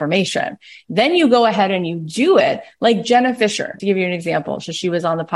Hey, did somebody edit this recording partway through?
yes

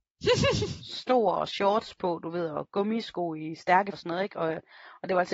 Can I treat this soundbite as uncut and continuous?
no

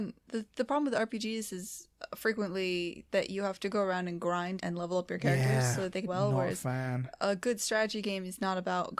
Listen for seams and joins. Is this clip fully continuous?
no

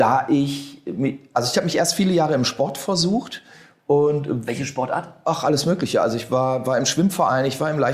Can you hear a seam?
no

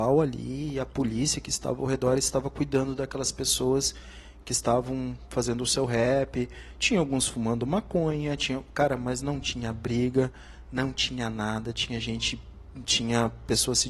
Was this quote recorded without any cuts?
yes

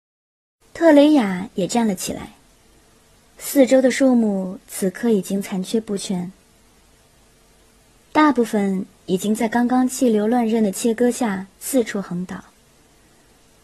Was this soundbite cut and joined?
yes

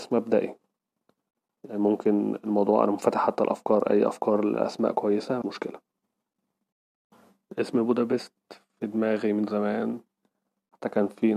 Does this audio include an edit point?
yes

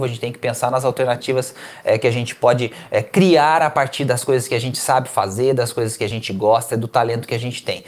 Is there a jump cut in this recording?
no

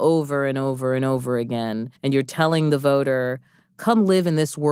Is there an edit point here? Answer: yes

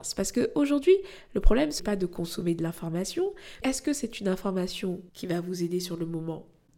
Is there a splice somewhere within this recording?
yes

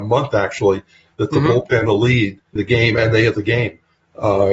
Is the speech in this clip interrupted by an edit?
yes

